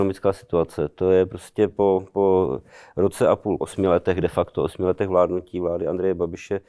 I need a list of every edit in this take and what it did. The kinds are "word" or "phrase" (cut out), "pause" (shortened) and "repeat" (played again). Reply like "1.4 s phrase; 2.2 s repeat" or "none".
3.6 s phrase